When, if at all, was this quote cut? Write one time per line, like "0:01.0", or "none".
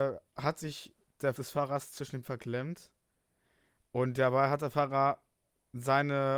0:01.4
0:02.2